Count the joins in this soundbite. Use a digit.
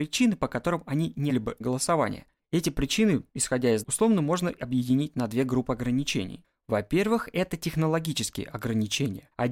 3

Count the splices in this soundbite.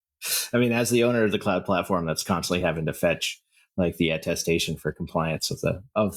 0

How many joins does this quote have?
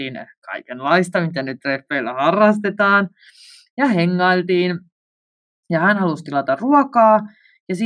0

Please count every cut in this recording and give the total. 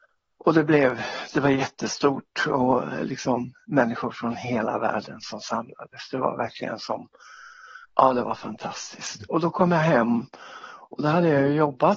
1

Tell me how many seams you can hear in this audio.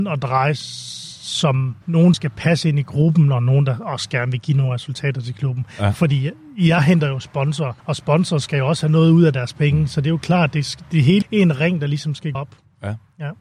5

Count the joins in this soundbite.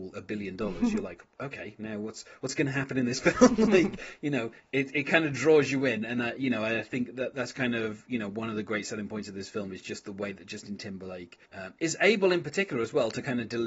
1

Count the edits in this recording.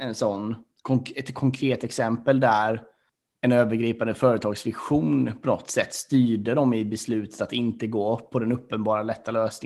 1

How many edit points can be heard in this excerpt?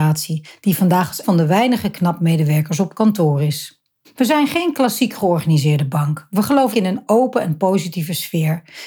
3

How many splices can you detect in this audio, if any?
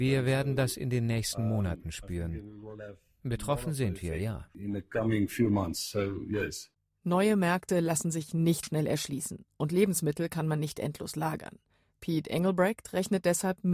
1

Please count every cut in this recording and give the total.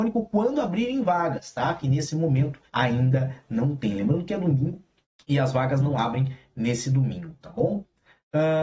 2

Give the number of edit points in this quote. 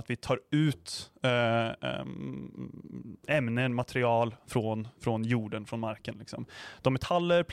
0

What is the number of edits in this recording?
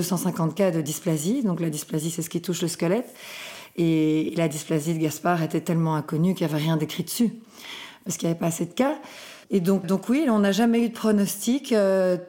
2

